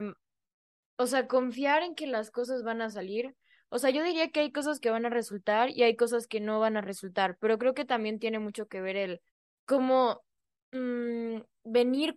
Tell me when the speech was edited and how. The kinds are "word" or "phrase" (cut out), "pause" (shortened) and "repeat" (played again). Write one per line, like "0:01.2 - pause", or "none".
0:09.3 - pause